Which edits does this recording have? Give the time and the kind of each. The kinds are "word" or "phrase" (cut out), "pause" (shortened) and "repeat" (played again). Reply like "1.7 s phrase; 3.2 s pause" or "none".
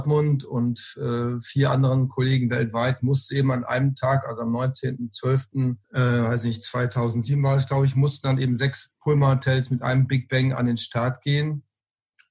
5.8 s pause